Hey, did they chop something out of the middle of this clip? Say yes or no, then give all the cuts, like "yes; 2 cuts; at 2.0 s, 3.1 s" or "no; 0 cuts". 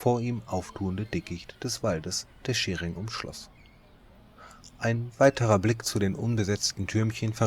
no; 0 cuts